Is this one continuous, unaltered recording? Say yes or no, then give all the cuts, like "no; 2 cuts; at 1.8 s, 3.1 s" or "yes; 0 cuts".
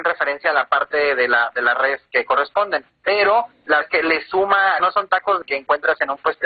no; 1 cut; at 3.8 s